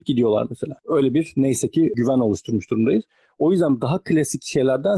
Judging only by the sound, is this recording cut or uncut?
uncut